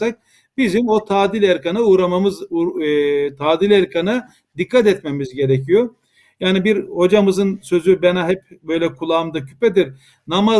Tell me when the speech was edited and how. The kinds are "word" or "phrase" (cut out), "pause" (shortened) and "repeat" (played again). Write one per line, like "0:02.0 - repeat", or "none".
none

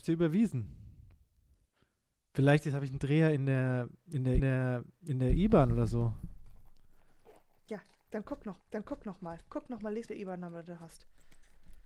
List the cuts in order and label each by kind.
0:04.4 - repeat
0:08.6 - repeat
0:10.1 - phrase

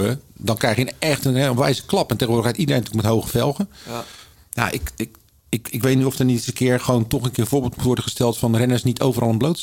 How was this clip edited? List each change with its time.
none

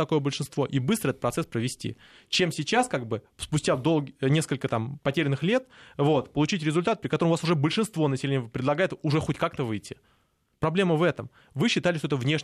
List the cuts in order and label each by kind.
none

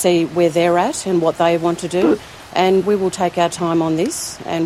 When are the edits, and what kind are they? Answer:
0:02.8 - word

